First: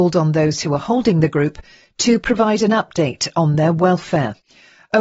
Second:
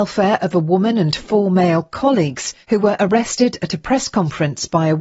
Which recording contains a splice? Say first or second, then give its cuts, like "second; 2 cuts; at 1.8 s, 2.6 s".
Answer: second; 1 cut; at 2.6 s